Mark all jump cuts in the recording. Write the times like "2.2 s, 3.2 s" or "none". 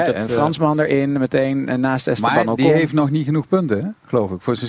none